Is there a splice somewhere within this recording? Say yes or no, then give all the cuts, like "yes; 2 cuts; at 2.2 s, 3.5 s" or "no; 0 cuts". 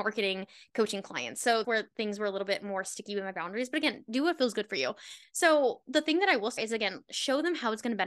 yes; 2 cuts; at 1.6 s, 6.6 s